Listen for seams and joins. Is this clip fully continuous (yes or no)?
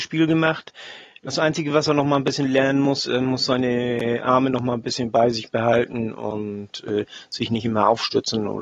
yes